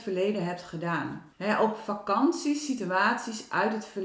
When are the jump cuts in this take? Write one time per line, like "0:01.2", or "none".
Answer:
0:01.3